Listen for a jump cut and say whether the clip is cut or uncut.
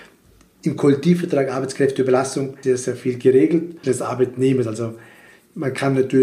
cut